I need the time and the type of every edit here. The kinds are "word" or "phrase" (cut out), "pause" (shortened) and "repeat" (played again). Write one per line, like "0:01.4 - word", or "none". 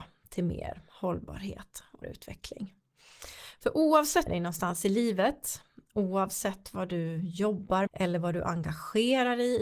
0:02.0 - word
0:04.3 - phrase
0:07.9 - word